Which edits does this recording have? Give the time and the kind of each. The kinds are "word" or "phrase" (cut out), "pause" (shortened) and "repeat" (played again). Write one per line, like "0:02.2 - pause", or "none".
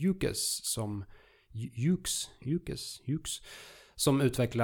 none